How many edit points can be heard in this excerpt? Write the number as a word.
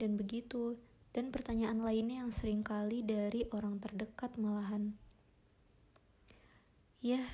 zero